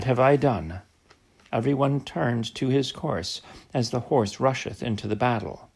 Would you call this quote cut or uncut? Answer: uncut